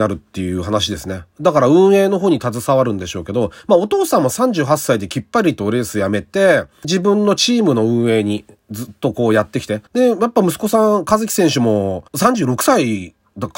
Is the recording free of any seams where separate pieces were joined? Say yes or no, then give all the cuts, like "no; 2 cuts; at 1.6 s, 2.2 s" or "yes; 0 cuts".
no; 3 cuts; at 6.8 s, 9.9 s, 12.1 s